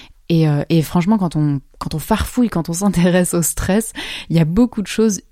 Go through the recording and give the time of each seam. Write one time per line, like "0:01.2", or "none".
0:01.7

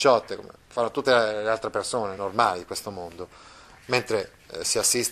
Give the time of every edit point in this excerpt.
none

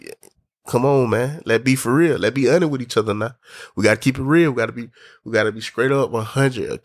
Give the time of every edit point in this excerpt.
none

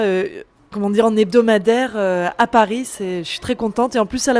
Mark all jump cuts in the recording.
none

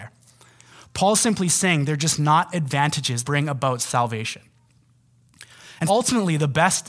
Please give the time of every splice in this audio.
0:03.2
0:05.9

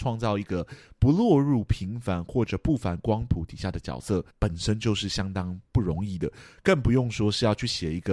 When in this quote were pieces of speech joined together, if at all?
0:04.3

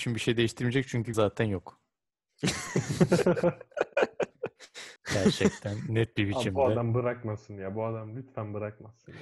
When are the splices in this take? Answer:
0:01.1
0:05.0

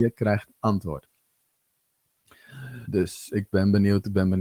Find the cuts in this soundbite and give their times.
0:02.8

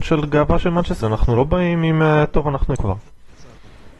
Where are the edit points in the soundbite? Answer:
0:01.0
0:02.8

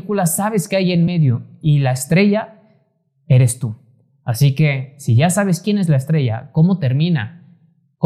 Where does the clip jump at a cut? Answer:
none

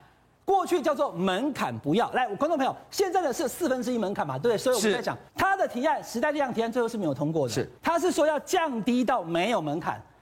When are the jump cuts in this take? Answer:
0:05.3
0:07.8

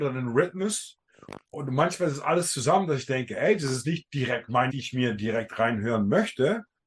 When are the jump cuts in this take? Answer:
0:01.4
0:04.7

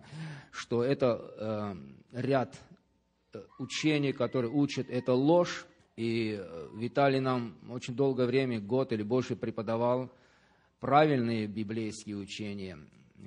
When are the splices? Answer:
0:03.5
0:05.8
0:07.6

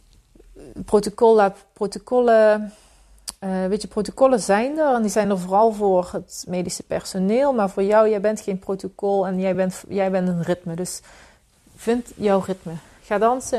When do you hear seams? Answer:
none

